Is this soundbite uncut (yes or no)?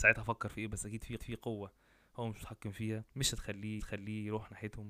no